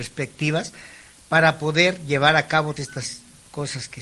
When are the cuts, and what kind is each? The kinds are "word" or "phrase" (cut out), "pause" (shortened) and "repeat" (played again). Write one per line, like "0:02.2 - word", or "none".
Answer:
0:02.8 - word